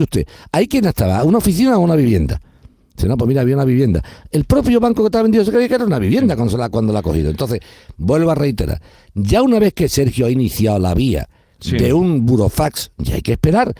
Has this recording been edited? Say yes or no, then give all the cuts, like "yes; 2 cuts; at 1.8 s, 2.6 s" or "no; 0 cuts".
no; 0 cuts